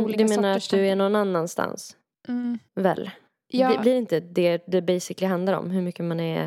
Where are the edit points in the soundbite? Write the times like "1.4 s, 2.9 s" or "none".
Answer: none